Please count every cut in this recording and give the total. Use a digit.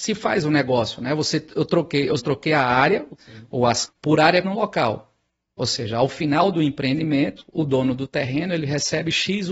4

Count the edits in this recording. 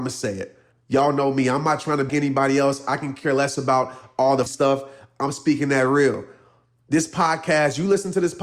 2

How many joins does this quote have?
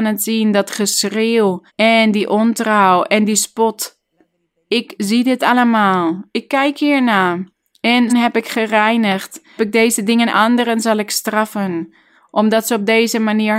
4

